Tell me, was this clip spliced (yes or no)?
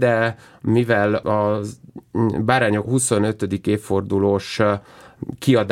yes